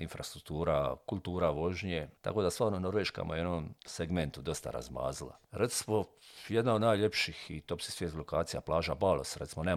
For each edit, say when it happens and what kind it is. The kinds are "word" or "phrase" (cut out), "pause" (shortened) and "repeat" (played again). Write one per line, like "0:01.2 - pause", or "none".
0:02.2 - pause
0:03.8 - pause
0:05.4 - pause